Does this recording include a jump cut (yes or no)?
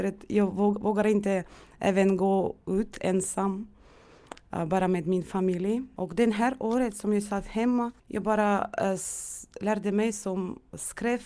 yes